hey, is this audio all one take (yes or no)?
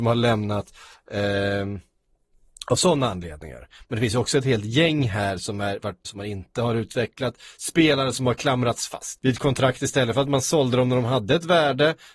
no